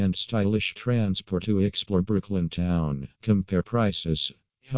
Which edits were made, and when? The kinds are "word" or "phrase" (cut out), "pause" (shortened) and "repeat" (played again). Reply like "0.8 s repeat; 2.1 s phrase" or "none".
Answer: 1.4 s word; 3.1 s pause